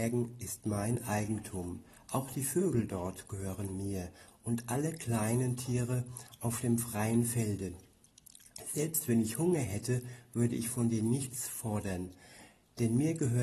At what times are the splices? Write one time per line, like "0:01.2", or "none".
none